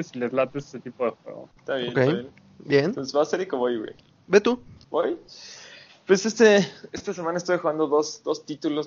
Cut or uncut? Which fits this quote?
uncut